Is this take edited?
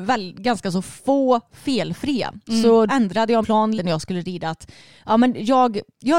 yes; 3 cuts; at 2.9 s, 3.4 s, 3.8 s

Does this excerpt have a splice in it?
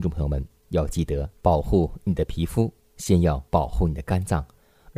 yes; 2 cuts; at 1.3 s, 3.5 s

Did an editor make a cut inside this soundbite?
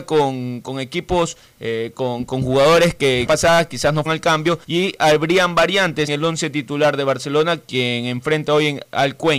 yes; 4 cuts; at 3.3 s, 4.1 s, 4.6 s, 6.1 s

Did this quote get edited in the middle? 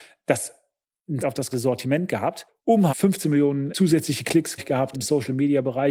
yes; 6 cuts; at 1.2 s, 1.5 s, 2.9 s, 3.7 s, 4.6 s, 4.9 s

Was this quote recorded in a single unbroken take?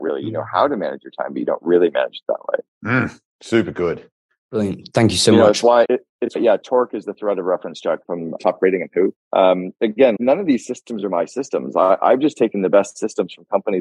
no; 5 cuts; at 5.9 s, 6.4 s, 8.0 s, 8.4 s, 10.2 s

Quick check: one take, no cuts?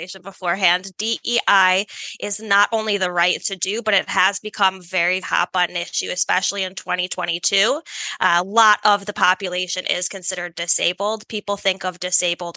no; 2 cuts; at 3.4 s, 5.2 s

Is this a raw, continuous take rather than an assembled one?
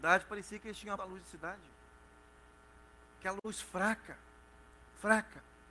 no; 1 cut; at 1.0 s

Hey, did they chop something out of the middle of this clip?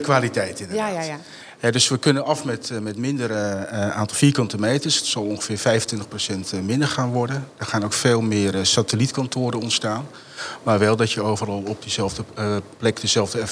no; 0 cuts

